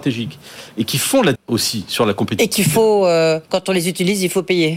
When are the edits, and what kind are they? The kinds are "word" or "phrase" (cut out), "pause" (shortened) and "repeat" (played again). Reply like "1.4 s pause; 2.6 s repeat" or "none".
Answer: 1.3 s word; 3.4 s pause